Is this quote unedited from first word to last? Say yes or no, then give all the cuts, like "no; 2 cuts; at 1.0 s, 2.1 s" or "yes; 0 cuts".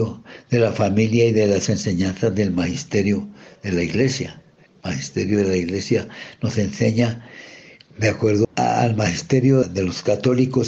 yes; 0 cuts